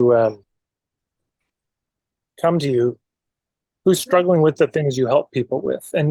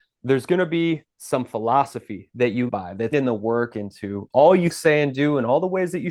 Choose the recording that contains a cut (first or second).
second